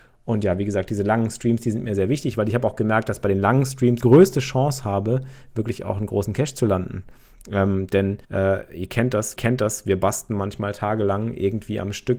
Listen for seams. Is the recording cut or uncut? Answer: cut